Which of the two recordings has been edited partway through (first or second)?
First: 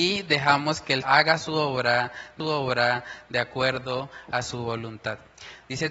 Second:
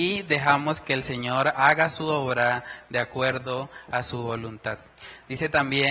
first